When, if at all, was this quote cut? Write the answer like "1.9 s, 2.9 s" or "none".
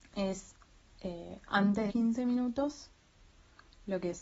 1.9 s